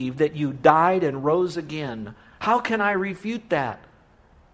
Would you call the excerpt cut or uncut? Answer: uncut